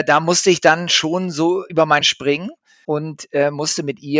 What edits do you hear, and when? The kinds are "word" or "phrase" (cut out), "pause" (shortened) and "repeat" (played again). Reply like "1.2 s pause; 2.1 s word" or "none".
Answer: 1.7 s word; 2.0 s word; 2.8 s word